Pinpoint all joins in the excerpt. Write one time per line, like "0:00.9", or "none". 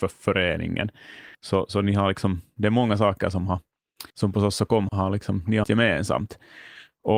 0:01.3
0:04.1
0:04.9
0:05.6